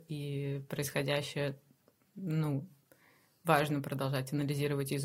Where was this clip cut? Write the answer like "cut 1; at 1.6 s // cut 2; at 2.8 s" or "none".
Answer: none